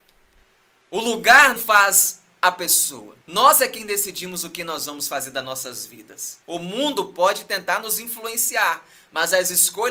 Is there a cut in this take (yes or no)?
yes